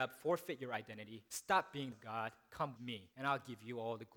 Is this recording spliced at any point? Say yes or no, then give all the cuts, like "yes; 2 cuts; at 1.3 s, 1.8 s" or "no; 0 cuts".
yes; 4 cuts; at 1.3 s, 1.9 s, 2.8 s, 3.1 s